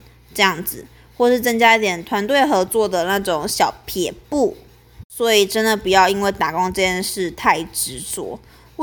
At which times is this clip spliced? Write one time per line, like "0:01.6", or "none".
0:05.1